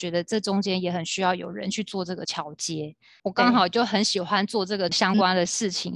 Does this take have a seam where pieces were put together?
yes; 1 cut; at 4.9 s

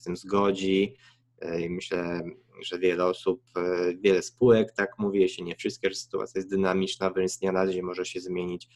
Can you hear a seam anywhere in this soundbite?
no; 0 cuts

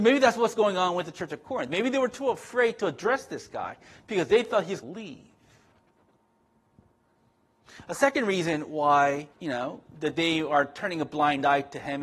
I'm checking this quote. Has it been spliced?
yes; 2 cuts; at 4.8 s, 9.3 s

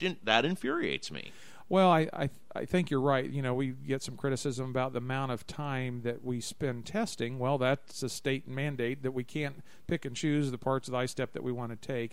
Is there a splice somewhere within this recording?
no; 0 cuts

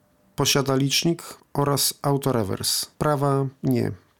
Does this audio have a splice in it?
yes; 2 cuts; at 1.4 s, 2.9 s

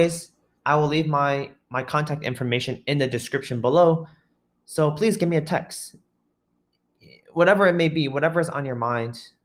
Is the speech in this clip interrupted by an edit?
no; 0 cuts

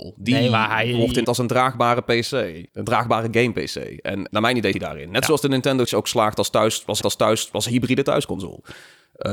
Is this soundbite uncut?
no; 6 cuts; at 1.2 s, 2.7 s, 4.3 s, 4.7 s, 5.8 s, 7.0 s

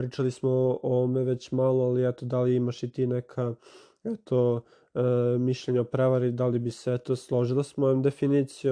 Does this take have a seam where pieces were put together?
no; 0 cuts

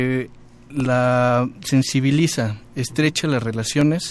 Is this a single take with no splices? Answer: yes; 0 cuts

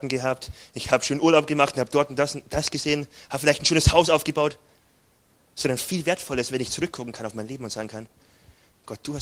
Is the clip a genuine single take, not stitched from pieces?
yes; 0 cuts

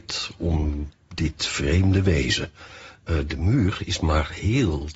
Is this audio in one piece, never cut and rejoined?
yes; 0 cuts

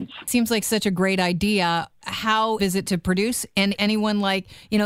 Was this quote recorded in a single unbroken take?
no; 2 cuts; at 2.6 s, 3.8 s

